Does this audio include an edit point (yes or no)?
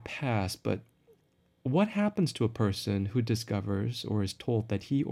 no